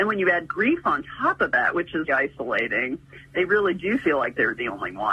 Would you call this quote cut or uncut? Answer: cut